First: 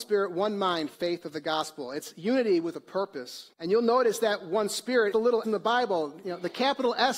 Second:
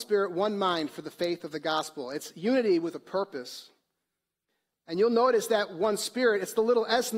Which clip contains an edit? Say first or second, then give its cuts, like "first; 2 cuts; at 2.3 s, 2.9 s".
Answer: first; 4 cuts; at 0.9 s, 3.5 s, 5.1 s, 5.4 s